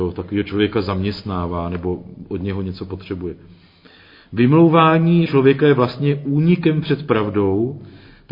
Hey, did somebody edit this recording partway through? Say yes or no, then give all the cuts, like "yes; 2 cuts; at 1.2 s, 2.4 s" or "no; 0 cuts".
yes; 1 cut; at 5.3 s